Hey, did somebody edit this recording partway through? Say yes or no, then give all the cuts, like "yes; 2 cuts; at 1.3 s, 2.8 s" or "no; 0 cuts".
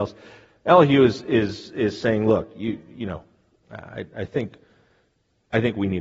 no; 0 cuts